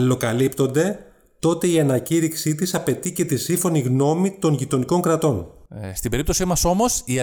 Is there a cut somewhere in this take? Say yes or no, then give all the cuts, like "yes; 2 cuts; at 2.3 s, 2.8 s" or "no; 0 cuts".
no; 0 cuts